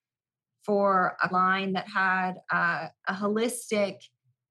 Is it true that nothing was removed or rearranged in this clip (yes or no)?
no